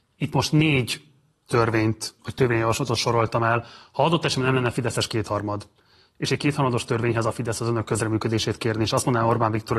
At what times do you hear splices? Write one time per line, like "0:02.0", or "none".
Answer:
0:02.2